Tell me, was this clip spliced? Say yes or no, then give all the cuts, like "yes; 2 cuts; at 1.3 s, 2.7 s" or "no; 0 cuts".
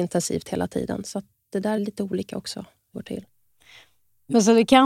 yes; 2 cuts; at 1.8 s, 2.9 s